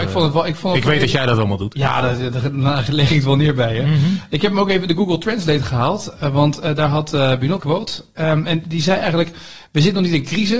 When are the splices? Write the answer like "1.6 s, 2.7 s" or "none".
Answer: 7.6 s

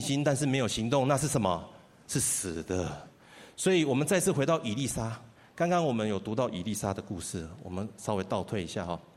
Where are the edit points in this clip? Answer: none

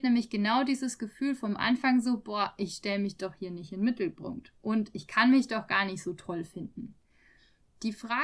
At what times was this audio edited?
none

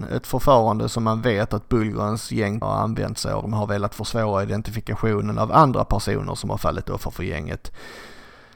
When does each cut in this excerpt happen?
2.6 s, 3.4 s

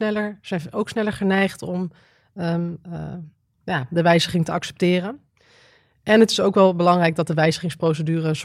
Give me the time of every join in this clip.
none

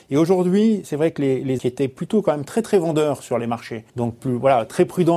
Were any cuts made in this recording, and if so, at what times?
1.6 s, 3.9 s

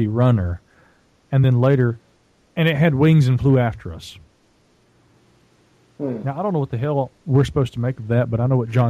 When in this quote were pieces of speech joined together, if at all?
none

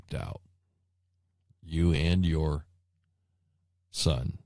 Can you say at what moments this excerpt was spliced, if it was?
none

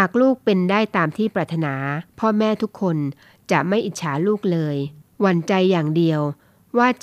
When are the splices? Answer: 2.1 s, 5.0 s

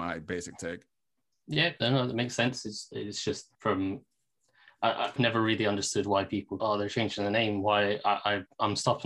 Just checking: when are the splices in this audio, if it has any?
3.5 s, 5.2 s, 6.6 s

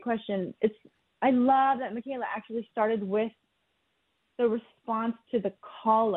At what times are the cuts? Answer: none

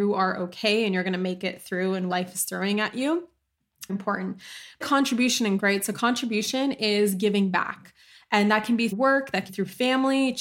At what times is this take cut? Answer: 2.1 s, 3.9 s, 4.8 s, 5.6 s, 8.9 s, 9.5 s

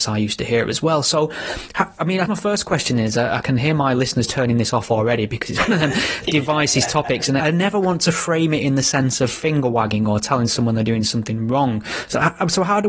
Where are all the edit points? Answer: 2.3 s, 7.4 s

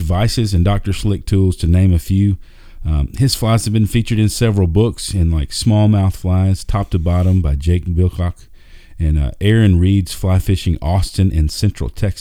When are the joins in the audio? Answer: none

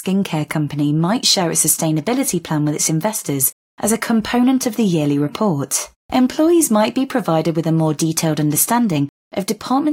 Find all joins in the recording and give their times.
5.9 s

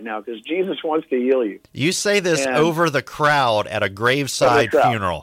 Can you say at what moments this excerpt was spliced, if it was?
none

